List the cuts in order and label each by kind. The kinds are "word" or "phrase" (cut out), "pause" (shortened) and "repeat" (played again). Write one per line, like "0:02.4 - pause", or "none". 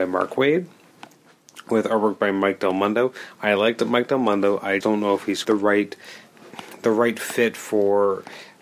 0:04.8 - word
0:05.4 - word